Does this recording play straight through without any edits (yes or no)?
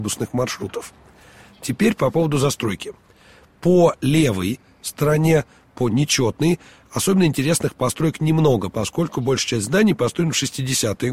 yes